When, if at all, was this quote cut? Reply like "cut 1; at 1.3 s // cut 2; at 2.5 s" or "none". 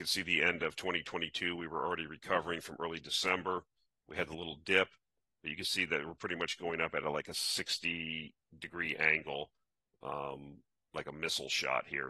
none